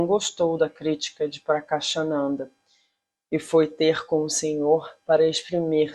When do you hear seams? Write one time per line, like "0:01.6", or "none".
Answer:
none